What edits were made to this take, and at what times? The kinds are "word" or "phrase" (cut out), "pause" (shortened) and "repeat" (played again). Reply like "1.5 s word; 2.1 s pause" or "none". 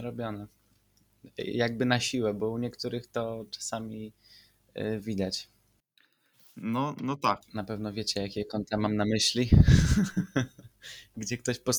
none